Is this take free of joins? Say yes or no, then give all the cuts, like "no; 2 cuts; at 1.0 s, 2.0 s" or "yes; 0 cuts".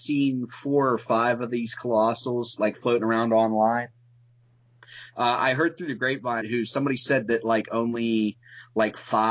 no; 1 cut; at 6.4 s